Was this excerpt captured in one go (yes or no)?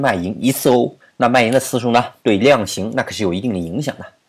no